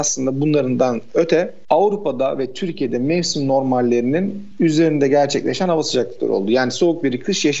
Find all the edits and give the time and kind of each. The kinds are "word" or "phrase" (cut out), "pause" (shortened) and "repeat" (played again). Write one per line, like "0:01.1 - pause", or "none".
none